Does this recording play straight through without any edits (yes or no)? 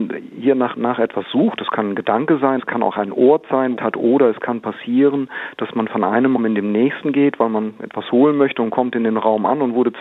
no